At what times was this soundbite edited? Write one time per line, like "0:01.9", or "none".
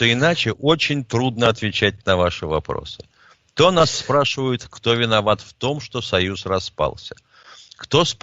none